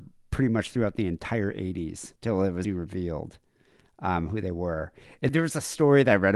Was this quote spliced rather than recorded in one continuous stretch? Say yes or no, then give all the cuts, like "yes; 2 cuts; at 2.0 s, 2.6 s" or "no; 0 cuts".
yes; 3 cuts; at 2.2 s, 2.6 s, 5.3 s